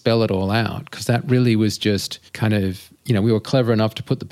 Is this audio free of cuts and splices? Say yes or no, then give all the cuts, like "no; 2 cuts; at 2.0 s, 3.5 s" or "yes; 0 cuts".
no; 2 cuts; at 2.3 s, 2.9 s